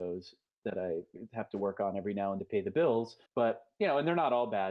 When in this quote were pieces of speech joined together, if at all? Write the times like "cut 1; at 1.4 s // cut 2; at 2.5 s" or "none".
cut 1; at 2.4 s // cut 2; at 3.3 s